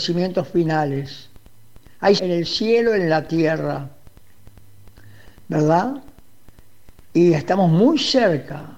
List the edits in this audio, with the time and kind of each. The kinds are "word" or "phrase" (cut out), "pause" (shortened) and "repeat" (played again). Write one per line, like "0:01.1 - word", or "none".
0:02.2 - word